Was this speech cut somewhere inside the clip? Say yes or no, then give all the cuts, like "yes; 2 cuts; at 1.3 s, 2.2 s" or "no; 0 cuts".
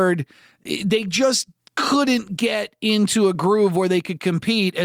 no; 0 cuts